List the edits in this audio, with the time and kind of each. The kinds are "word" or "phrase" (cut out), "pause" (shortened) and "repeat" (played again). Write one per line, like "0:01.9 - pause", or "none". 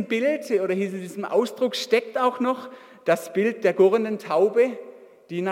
none